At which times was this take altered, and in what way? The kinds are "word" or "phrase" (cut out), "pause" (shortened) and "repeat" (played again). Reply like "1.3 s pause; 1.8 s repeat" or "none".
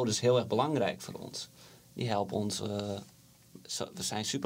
none

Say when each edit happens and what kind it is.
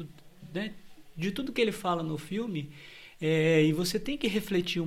none

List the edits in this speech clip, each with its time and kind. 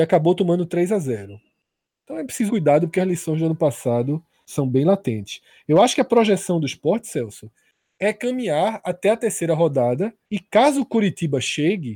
2.5 s word; 4.5 s word; 10.2 s pause

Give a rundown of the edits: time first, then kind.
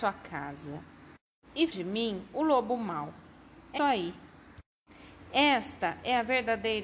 1.7 s word; 3.8 s word

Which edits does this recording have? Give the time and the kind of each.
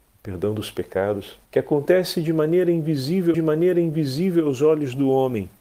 1.5 s pause; 3.3 s repeat

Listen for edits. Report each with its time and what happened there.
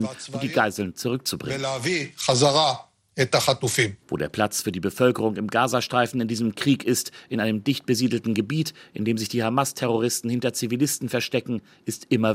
4.0 s pause

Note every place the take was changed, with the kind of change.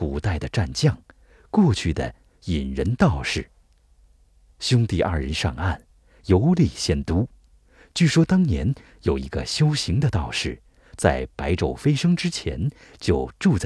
none

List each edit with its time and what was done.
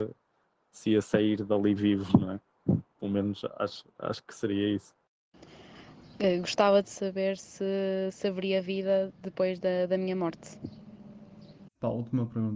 none

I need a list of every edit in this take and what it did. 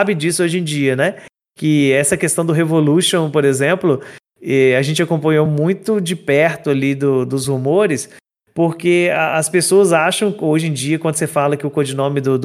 none

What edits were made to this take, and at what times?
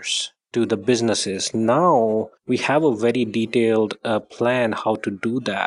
2.4 s pause

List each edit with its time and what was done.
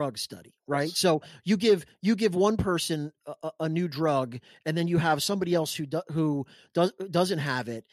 none

